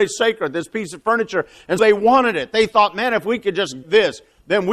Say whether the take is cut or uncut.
cut